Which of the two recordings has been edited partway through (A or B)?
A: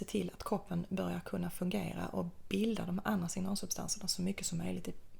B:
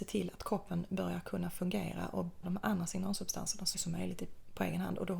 B